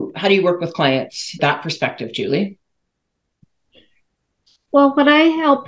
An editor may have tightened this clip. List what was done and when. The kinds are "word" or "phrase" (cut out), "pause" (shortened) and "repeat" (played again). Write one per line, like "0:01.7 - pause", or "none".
0:01.4 - word